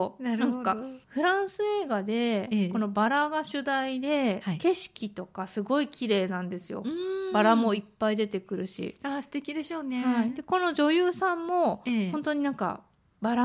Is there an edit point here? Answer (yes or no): yes